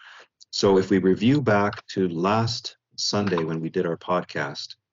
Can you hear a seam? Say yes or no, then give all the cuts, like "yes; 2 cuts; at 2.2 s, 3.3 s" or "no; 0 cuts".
no; 0 cuts